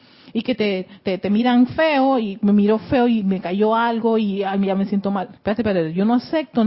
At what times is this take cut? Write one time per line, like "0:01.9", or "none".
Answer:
0:05.4